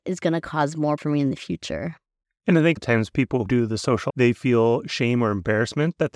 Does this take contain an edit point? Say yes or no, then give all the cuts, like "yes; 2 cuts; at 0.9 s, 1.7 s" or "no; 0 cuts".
yes; 4 cuts; at 1.0 s, 2.8 s, 3.5 s, 4.1 s